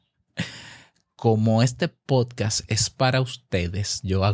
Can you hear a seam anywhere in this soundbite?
no; 0 cuts

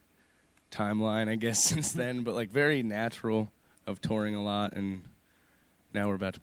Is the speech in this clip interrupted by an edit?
no; 0 cuts

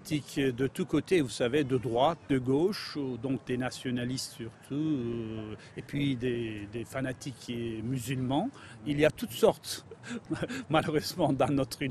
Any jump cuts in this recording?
no; 0 cuts

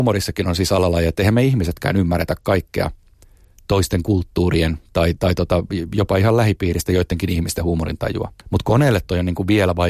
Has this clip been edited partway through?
yes; 1 cut; at 8.4 s

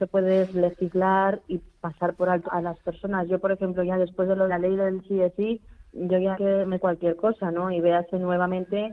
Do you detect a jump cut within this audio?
yes; 6 cuts; at 1.4 s, 2.4 s, 4.5 s, 5.9 s, 6.3 s, 6.8 s

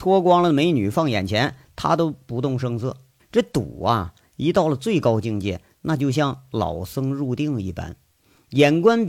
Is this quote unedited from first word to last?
no; 1 cut; at 3.2 s

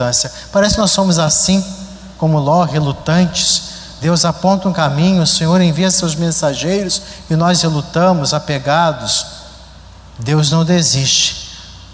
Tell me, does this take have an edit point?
no; 0 cuts

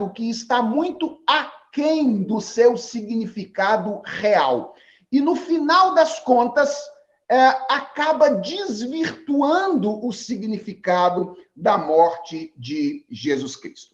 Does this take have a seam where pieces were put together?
no; 0 cuts

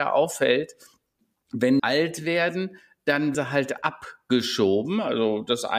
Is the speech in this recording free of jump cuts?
no; 2 cuts; at 1.8 s, 3.3 s

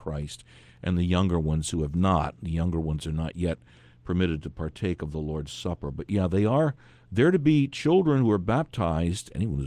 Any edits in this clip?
no; 0 cuts

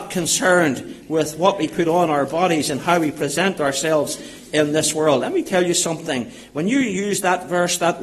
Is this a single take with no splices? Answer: yes; 0 cuts

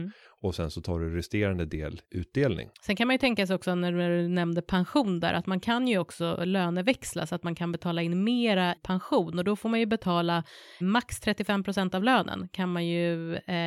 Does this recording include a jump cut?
yes; 4 cuts; at 2.0 s, 2.7 s, 8.8 s, 10.8 s

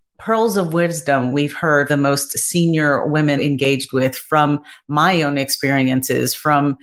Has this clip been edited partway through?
yes; 2 cuts; at 1.9 s, 3.4 s

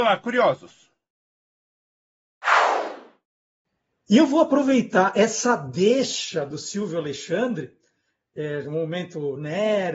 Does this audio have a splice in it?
no; 0 cuts

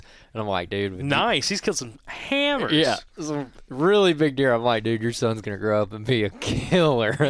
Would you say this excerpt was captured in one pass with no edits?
yes; 0 cuts

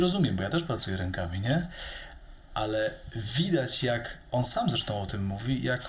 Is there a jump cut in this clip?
no; 0 cuts

